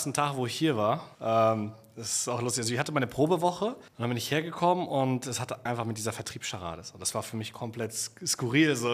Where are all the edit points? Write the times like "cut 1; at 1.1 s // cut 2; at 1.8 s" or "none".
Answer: cut 1; at 1.1 s // cut 2; at 3.9 s // cut 3; at 5.7 s